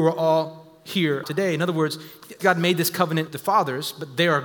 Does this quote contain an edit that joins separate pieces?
yes; 3 cuts; at 1.2 s, 2.4 s, 3.3 s

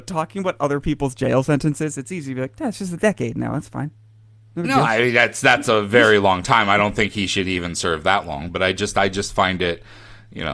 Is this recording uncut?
yes; 0 cuts

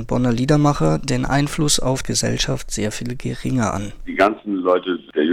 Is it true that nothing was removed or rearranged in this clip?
no; 1 cut; at 2.0 s

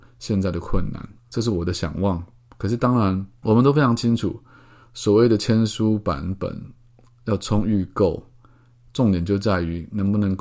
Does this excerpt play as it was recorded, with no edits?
yes; 0 cuts

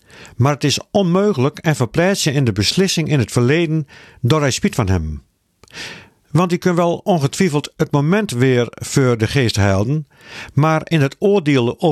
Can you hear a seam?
no; 0 cuts

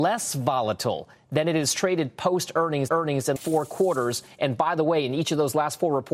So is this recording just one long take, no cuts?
no; 2 cuts; at 2.9 s, 3.4 s

